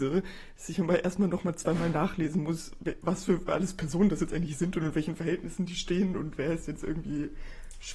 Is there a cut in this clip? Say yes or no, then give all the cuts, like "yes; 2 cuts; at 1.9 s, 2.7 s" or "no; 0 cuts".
no; 0 cuts